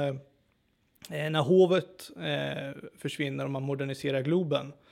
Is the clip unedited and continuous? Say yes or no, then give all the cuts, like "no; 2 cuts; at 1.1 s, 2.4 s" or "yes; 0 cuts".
yes; 0 cuts